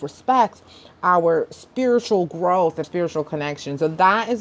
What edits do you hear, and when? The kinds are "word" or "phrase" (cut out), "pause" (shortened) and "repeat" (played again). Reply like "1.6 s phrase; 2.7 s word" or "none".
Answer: 2.8 s word